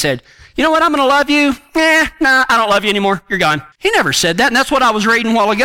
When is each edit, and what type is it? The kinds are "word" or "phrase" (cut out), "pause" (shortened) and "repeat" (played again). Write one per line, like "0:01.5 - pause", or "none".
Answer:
0:03.7 - pause